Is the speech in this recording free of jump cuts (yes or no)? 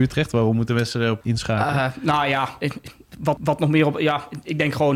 no